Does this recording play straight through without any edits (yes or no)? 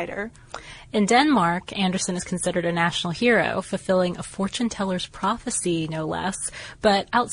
yes